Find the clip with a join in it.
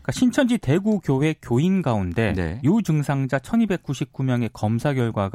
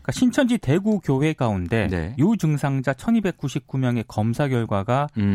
second; 1 cut; at 1.4 s

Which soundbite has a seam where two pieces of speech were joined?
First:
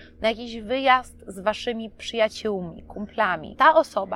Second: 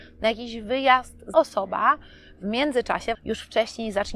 second; 2 cuts; at 1.3 s, 3.1 s

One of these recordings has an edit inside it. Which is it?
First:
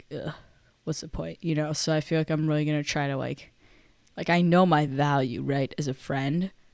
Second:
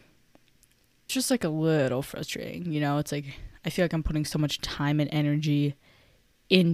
second; 1 cut; at 1.1 s

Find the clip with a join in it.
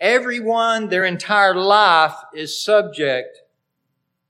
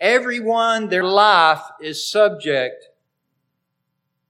second; 1 cut; at 1.0 s

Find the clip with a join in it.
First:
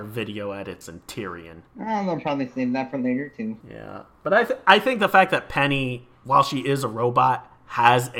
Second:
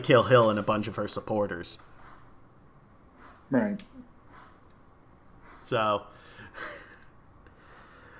first; 2 cuts; at 1.7 s, 3.6 s

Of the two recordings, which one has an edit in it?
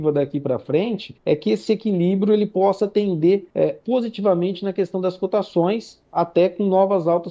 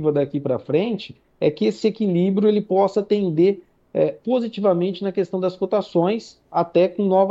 first; 2 cuts; at 1.2 s, 3.5 s

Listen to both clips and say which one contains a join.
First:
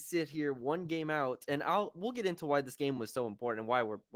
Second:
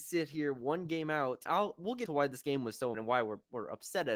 second; 3 cuts; at 1.5 s, 2.1 s, 2.9 s

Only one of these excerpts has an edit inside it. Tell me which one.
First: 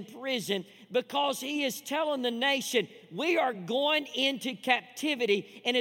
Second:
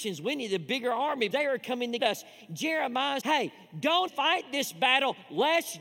second; 4 cuts; at 1.3 s, 2.0 s, 3.2 s, 4.1 s

